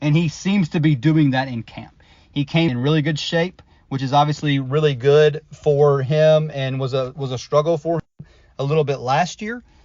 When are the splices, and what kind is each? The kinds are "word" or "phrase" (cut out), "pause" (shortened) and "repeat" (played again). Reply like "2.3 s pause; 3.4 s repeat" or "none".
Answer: 2.7 s word